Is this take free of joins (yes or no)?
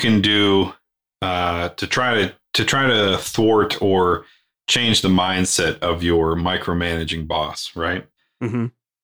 yes